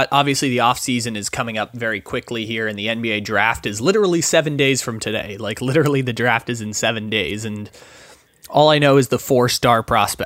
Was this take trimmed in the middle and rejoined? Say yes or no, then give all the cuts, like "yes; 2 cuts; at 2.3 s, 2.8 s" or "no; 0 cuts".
no; 0 cuts